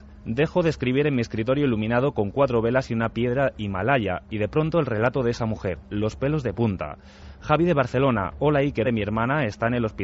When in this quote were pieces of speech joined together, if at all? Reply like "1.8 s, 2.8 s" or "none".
8.8 s